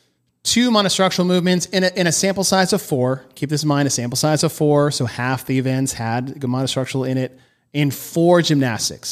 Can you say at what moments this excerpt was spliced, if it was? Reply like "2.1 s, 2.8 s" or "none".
none